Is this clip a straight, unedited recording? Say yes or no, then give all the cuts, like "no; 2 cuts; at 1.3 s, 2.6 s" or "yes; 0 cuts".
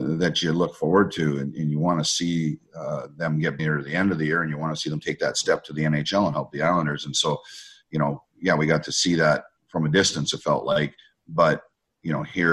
no; 1 cut; at 3.6 s